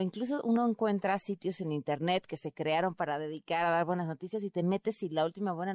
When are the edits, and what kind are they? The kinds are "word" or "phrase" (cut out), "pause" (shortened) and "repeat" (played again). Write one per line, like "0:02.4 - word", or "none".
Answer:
none